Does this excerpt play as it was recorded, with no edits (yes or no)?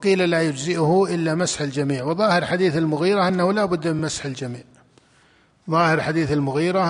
yes